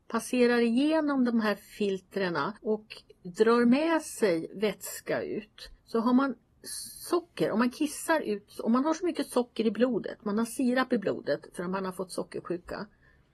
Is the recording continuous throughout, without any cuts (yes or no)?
no